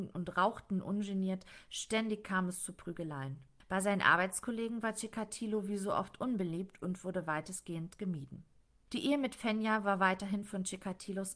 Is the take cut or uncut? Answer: uncut